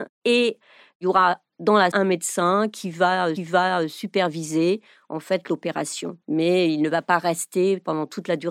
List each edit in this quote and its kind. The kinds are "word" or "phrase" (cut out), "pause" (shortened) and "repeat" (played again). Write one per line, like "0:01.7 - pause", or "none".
0:01.9 - word
0:03.4 - repeat
0:06.2 - pause